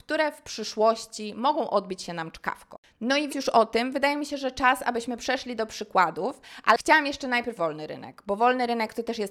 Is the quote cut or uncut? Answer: cut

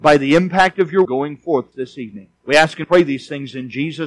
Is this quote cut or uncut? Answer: cut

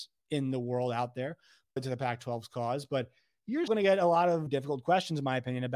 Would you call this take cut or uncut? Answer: cut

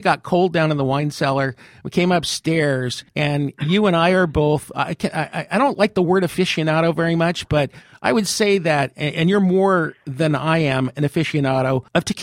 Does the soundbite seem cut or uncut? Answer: uncut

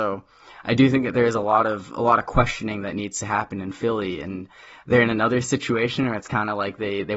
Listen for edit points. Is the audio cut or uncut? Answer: uncut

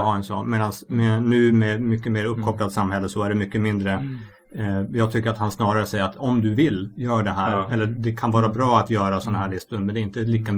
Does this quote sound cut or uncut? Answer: uncut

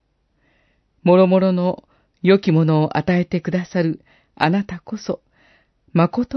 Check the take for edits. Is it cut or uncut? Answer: uncut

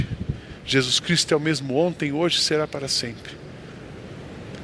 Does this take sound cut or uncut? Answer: uncut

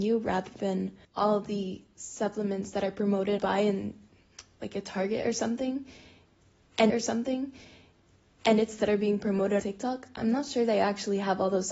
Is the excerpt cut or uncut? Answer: cut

